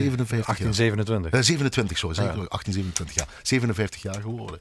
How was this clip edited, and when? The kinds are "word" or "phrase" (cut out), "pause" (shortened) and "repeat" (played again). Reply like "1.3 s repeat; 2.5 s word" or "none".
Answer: none